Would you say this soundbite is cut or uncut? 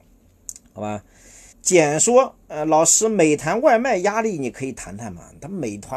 cut